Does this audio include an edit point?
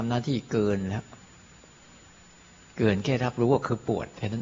no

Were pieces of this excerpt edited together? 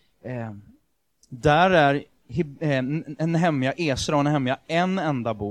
no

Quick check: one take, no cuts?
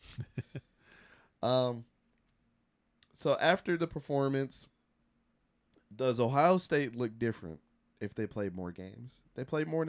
yes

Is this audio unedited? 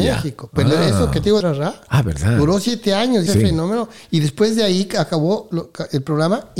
no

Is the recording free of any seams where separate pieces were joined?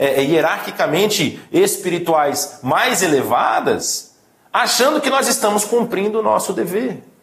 yes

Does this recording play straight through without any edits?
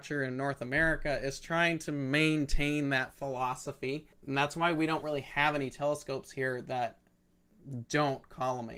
no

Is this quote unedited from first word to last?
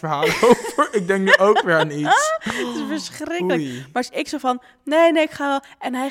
yes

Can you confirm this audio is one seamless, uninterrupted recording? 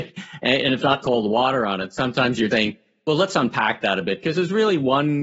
no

